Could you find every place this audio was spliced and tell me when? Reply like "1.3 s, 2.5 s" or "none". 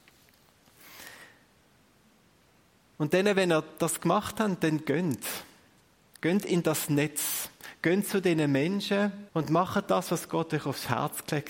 9.3 s